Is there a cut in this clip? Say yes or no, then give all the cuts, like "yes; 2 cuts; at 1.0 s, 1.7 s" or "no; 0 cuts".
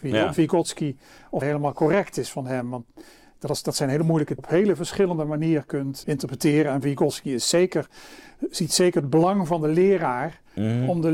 yes; 3 cuts; at 1.4 s, 4.4 s, 6.0 s